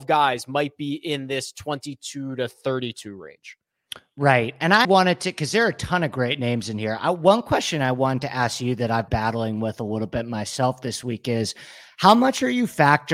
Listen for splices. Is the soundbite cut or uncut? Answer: cut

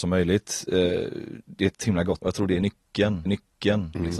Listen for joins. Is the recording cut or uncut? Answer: cut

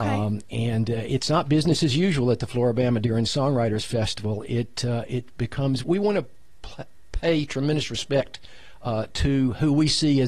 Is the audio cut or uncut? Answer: cut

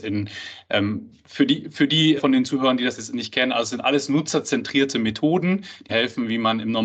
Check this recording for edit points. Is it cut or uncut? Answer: cut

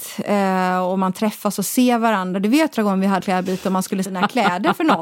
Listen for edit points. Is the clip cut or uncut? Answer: cut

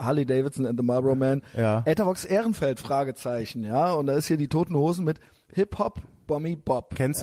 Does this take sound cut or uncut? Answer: uncut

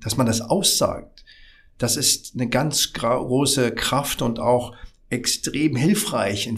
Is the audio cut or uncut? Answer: uncut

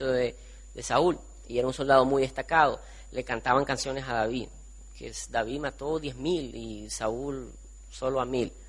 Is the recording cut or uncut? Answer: uncut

